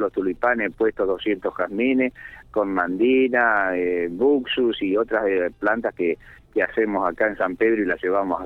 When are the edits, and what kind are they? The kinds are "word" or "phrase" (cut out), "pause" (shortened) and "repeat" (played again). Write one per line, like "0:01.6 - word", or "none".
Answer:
none